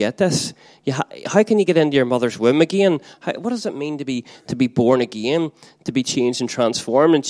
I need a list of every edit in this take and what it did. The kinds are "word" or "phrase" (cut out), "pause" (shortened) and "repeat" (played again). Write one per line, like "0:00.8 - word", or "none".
none